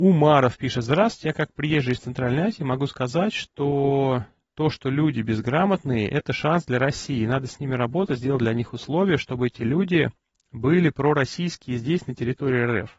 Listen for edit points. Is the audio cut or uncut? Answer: uncut